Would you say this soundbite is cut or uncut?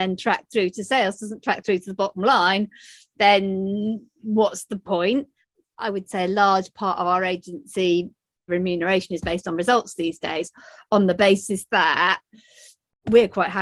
uncut